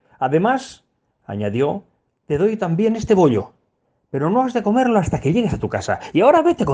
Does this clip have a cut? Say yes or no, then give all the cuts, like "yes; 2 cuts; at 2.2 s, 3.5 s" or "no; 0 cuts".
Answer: no; 0 cuts